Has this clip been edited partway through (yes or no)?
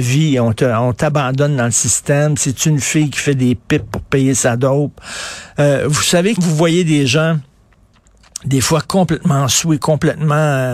yes